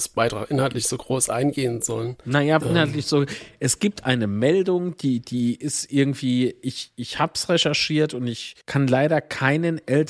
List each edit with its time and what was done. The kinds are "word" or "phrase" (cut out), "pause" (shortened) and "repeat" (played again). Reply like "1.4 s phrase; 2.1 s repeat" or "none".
2.6 s phrase; 8.6 s pause